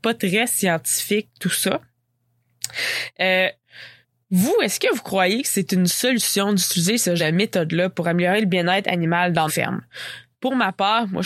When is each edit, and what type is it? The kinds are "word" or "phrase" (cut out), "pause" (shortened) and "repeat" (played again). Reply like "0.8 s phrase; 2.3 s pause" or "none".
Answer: 4.0 s pause; 7.2 s word; 9.5 s word